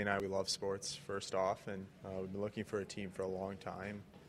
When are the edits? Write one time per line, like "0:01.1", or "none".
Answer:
0:02.0